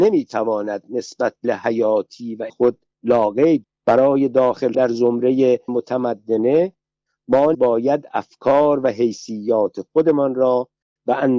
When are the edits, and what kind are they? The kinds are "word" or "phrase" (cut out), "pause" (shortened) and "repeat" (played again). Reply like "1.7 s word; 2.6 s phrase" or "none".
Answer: 1.4 s word; 2.5 s word; 3.6 s word; 4.7 s word; 5.7 s word; 7.5 s word

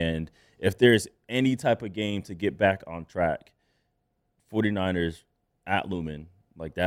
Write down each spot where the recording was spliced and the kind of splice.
none

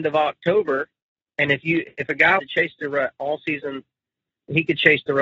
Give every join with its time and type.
2.4 s word

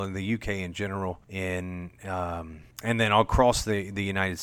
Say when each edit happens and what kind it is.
1.2 s pause; 2.7 s pause

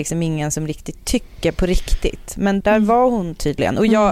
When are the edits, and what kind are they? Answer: 2.6 s word

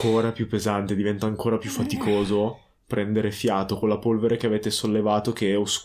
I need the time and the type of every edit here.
none

